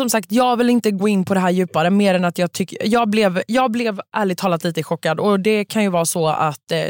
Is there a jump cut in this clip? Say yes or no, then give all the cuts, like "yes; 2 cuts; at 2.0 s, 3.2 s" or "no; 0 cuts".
no; 0 cuts